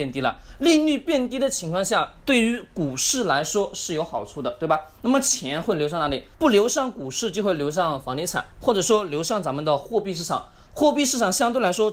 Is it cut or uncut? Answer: cut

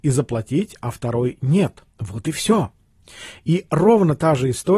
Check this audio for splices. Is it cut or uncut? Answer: cut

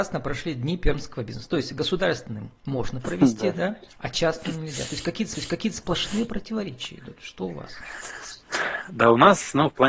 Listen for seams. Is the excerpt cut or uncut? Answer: cut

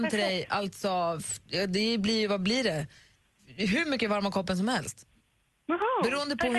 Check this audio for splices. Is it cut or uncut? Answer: uncut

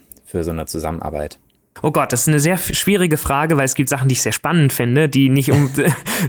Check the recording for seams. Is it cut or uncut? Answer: uncut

